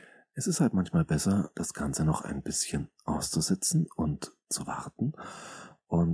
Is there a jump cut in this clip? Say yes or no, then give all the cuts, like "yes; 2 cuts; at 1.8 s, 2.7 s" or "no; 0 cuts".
no; 0 cuts